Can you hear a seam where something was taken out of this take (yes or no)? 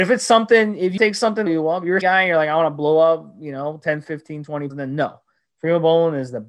yes